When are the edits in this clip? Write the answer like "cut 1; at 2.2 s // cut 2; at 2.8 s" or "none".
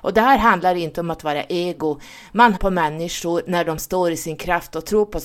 cut 1; at 2.6 s